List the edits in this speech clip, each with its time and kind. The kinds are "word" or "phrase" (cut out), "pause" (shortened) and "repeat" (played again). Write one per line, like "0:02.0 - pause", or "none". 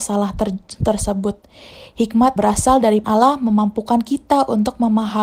0:02.4 - word
0:03.0 - word